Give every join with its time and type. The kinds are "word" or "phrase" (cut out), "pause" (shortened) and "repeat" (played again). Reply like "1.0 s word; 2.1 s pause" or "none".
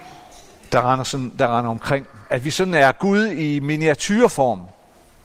none